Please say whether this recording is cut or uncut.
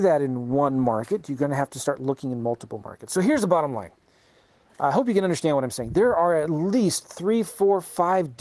uncut